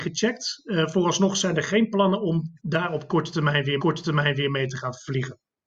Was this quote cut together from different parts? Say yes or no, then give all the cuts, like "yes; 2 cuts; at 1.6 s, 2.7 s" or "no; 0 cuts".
yes; 2 cuts; at 2.6 s, 3.8 s